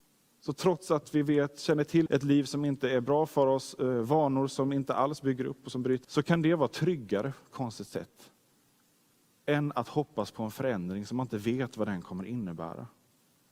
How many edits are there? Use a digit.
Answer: 3